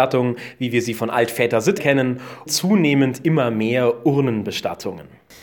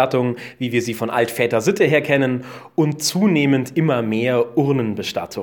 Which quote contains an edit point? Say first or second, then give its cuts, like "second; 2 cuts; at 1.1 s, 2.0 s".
first; 2 cuts; at 1.8 s, 2.5 s